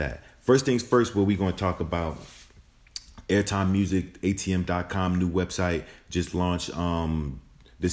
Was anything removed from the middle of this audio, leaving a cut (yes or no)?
no